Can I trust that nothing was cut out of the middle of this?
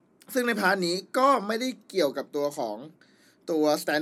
yes; 0 cuts

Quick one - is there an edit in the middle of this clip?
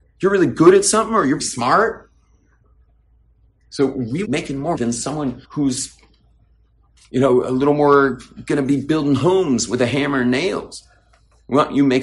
yes; 4 cuts; at 1.4 s, 4.2 s, 4.7 s, 5.4 s

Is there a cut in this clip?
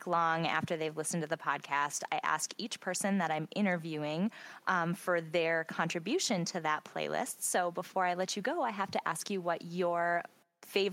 no; 0 cuts

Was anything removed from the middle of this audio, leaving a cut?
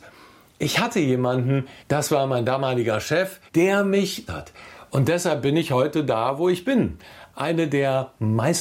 yes; 3 cuts; at 1.8 s, 3.5 s, 4.3 s

